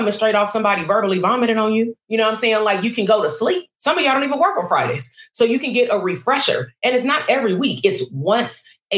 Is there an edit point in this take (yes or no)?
yes